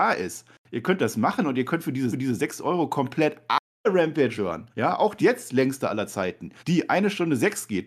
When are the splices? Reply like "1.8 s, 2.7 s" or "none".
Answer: 2.1 s, 4.4 s, 4.7 s, 5.2 s, 6.6 s